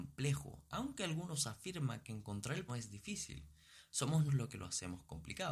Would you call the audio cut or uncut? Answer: cut